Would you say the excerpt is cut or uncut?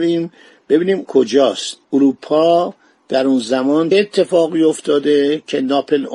cut